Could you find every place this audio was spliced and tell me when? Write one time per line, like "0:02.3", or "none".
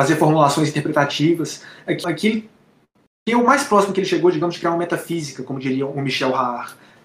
0:02.0